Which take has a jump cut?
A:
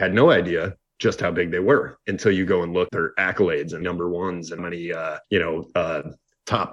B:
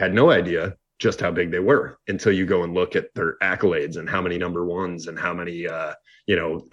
A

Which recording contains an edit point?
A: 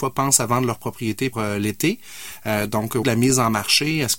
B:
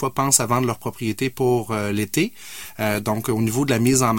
A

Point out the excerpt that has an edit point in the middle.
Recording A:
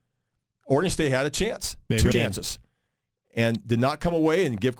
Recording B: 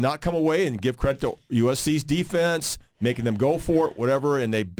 A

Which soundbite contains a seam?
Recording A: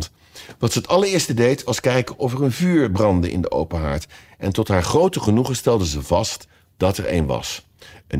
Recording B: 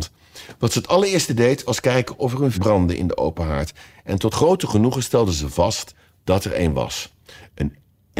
B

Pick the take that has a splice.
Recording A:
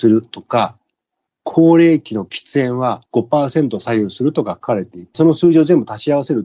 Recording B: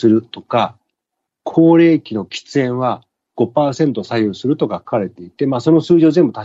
A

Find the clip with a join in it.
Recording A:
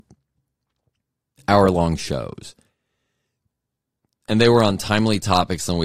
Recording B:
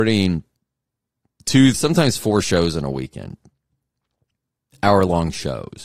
B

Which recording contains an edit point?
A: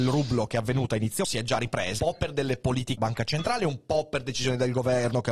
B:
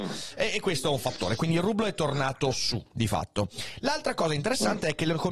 A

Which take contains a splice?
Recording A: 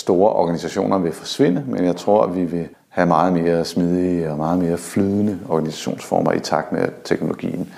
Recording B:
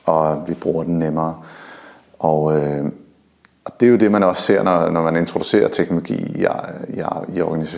A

